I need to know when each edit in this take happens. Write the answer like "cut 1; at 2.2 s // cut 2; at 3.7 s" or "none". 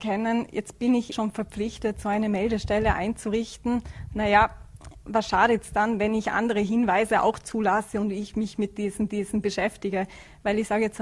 cut 1; at 1.1 s // cut 2; at 9.1 s